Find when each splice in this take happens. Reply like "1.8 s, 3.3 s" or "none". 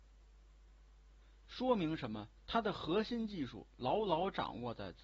2.4 s